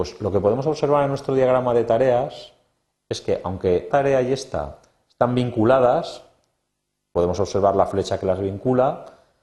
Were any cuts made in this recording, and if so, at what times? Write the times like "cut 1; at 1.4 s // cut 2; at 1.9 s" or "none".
cut 1; at 3.9 s